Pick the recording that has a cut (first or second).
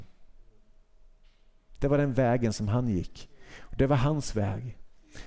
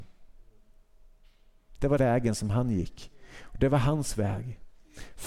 second